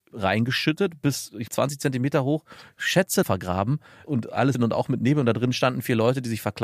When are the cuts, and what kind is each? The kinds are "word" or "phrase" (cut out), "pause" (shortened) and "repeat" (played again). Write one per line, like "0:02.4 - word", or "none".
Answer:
0:01.5 - word
0:03.2 - word
0:04.5 - word